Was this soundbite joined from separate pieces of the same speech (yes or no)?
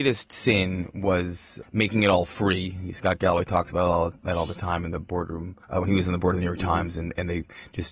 yes